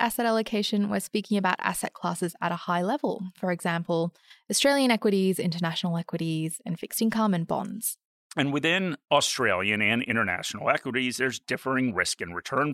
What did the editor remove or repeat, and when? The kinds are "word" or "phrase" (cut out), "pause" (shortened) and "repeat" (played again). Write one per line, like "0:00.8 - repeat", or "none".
none